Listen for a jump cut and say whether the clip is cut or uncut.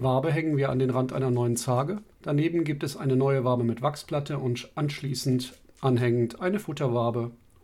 cut